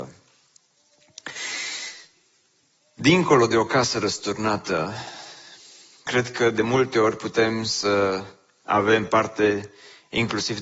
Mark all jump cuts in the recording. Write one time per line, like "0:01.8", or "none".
none